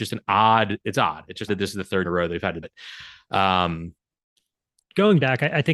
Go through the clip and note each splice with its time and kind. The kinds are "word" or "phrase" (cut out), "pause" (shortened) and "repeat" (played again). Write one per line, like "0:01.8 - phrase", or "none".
0:01.5 - word
0:02.0 - word
0:02.6 - word